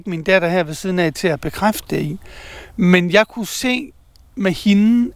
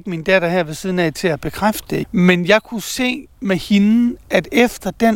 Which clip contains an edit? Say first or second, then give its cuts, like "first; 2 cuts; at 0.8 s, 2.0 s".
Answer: second; 2 cuts; at 2.0 s, 3.3 s